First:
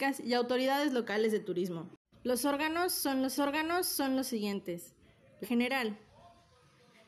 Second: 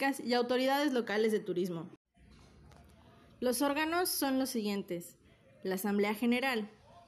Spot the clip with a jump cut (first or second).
first